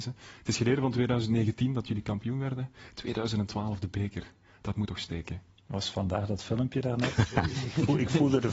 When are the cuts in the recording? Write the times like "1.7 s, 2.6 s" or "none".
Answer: none